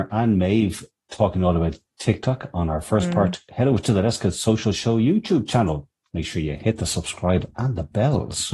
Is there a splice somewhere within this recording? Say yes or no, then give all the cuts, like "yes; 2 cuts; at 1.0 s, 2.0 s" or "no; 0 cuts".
no; 0 cuts